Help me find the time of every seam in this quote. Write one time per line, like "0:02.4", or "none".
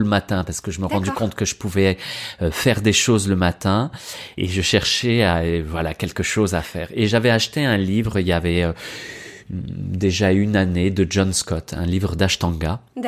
0:04.4